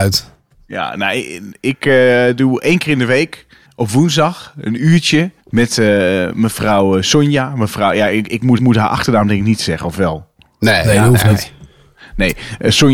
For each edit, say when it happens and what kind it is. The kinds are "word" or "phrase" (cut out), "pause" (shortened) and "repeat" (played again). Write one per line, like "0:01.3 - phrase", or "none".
0:03.6 - pause
0:05.4 - pause
0:08.6 - repeat